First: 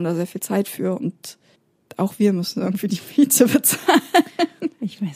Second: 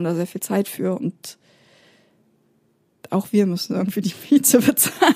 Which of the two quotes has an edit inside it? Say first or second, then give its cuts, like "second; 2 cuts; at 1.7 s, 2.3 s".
first; 1 cut; at 1.6 s